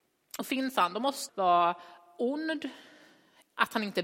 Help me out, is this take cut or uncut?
cut